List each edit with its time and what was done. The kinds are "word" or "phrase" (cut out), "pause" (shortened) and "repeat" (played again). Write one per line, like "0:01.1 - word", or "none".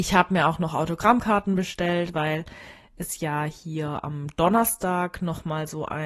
none